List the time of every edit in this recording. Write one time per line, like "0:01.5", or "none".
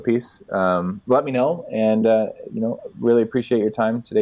none